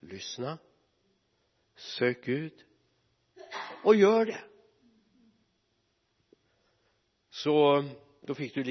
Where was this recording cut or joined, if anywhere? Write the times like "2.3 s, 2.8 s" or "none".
none